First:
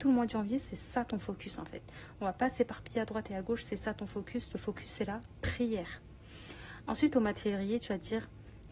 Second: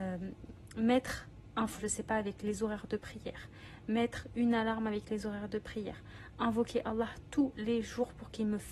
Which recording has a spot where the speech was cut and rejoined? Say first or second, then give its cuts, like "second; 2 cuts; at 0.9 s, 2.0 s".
second; 1 cut; at 1.8 s